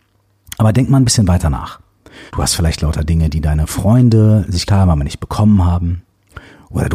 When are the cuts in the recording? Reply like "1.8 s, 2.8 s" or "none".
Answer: 2.3 s, 4.7 s